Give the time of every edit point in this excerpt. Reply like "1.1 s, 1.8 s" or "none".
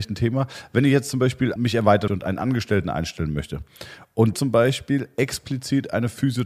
1.6 s, 2.1 s, 4.3 s

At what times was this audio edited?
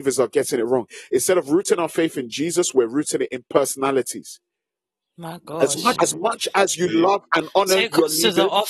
6.0 s

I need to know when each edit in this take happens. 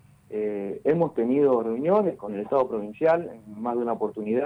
2.2 s

